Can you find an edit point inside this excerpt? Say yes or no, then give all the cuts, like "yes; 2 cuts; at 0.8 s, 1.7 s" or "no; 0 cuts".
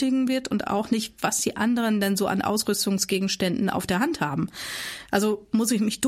no; 0 cuts